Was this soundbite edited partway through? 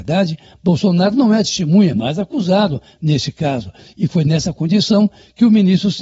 no; 0 cuts

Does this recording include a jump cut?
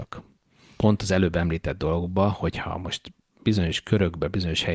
no; 0 cuts

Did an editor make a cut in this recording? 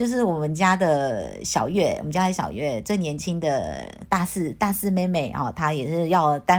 no; 0 cuts

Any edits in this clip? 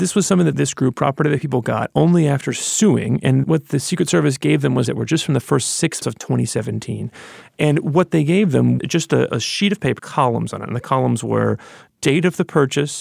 yes; 5 cuts; at 3.4 s, 4.8 s, 6.0 s, 8.8 s, 10.0 s

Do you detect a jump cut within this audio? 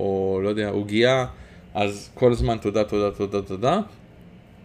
no; 0 cuts

